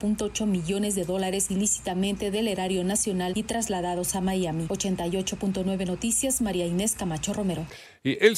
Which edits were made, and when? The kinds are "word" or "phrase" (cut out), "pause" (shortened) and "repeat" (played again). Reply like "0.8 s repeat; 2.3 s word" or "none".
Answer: 1.5 s word